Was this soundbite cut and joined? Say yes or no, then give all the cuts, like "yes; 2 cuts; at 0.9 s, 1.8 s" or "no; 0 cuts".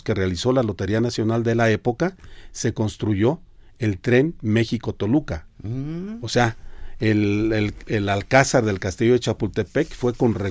no; 0 cuts